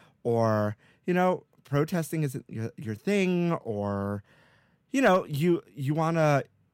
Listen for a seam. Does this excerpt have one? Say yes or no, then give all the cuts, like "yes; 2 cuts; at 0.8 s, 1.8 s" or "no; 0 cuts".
no; 0 cuts